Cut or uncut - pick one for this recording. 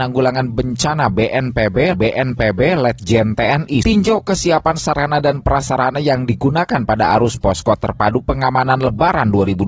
cut